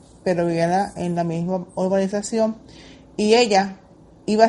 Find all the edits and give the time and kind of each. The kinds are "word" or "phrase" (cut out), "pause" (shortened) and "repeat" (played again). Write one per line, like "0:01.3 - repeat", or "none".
none